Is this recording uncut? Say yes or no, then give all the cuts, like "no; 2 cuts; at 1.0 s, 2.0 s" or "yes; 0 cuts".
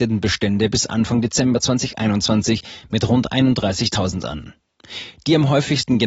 yes; 0 cuts